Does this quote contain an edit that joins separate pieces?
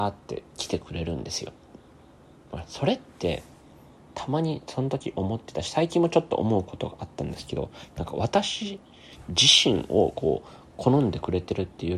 no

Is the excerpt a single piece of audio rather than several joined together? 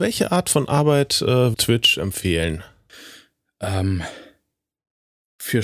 no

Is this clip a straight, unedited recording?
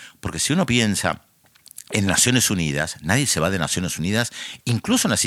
yes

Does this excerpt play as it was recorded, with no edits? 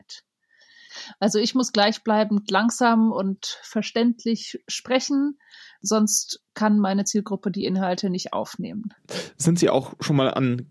yes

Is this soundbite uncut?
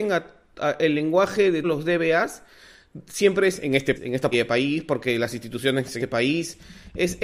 no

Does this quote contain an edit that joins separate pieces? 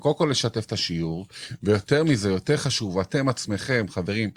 no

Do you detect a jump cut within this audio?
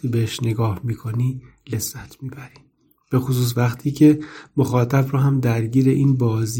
no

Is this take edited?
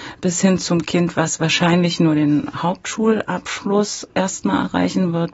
yes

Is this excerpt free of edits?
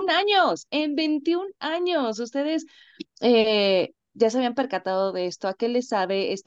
no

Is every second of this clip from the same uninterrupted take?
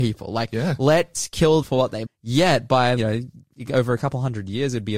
no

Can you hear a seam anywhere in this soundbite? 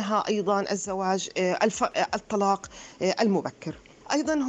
no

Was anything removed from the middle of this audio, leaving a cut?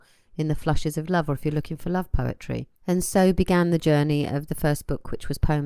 yes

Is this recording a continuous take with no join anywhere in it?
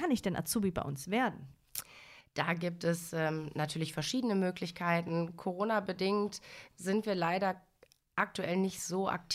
yes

